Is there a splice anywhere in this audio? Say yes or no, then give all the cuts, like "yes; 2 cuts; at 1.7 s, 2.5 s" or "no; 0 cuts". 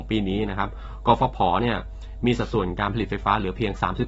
no; 0 cuts